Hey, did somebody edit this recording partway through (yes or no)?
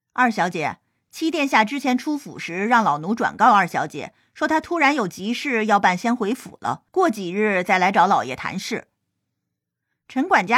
yes